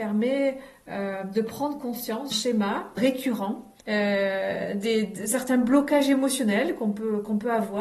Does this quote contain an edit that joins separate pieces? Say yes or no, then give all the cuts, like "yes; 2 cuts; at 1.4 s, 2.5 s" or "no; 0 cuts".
yes; 3 cuts; at 2.3 s, 3.0 s, 3.8 s